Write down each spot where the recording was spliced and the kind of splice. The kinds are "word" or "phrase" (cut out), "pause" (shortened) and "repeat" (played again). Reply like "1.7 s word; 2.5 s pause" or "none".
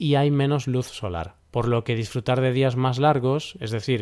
1.4 s pause